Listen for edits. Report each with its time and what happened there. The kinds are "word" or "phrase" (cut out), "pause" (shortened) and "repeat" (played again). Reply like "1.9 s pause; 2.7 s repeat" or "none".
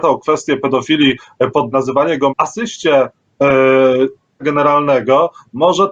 1.7 s word; 2.3 s word; 4.4 s word